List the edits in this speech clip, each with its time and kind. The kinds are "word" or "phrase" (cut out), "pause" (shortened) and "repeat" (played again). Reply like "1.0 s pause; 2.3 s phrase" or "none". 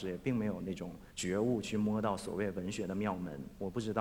1.1 s pause